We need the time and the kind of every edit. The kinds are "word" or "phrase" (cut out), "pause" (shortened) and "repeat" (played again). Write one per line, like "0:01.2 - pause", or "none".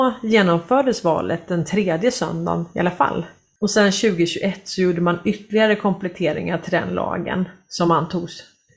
none